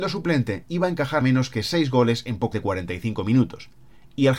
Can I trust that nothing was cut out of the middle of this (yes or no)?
no